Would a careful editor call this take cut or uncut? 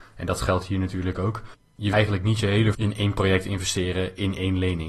cut